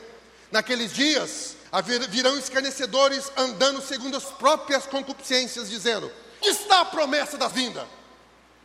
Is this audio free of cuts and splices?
no; 4 cuts; at 1.7 s, 4.2 s, 6.4 s, 7.5 s

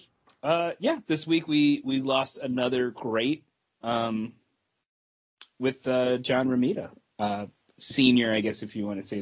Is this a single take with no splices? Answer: yes; 0 cuts

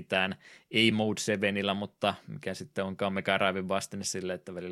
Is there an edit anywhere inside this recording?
no; 0 cuts

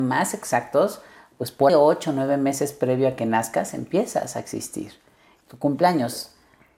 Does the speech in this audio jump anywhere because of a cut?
yes; 2 cuts; at 1.7 s, 5.4 s

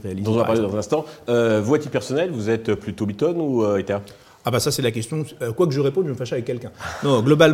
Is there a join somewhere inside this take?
no; 0 cuts

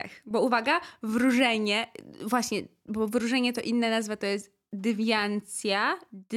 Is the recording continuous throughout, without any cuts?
yes; 0 cuts

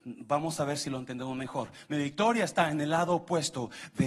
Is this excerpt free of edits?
yes; 0 cuts

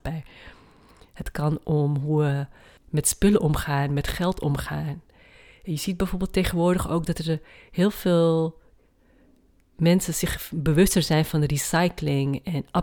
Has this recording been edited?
no; 0 cuts

